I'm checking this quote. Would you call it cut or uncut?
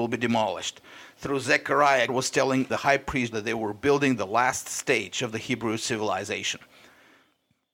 cut